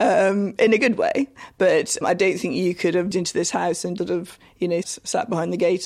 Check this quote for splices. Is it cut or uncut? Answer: cut